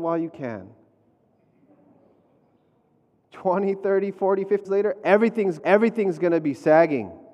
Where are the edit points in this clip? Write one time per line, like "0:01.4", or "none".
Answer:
0:04.6
0:05.6